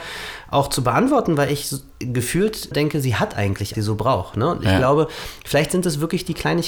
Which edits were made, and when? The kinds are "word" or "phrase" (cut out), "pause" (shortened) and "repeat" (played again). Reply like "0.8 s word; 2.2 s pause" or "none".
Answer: 2.7 s word; 3.7 s phrase